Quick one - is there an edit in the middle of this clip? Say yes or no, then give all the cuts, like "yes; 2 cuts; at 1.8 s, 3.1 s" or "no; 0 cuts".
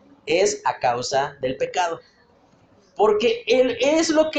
no; 0 cuts